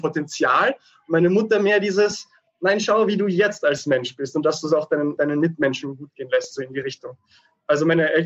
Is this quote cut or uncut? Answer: cut